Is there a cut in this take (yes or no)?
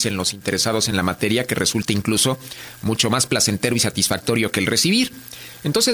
no